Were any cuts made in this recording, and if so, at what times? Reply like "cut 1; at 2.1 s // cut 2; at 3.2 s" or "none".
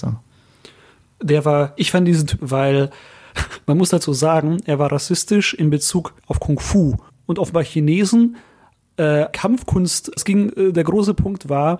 cut 1; at 1.8 s // cut 2; at 2.4 s // cut 3; at 6.2 s // cut 4; at 7.1 s // cut 5; at 9.3 s // cut 6; at 10.2 s